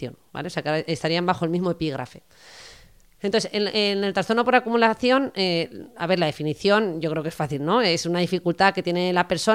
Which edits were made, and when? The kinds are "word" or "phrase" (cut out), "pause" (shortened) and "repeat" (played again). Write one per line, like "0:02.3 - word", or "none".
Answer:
none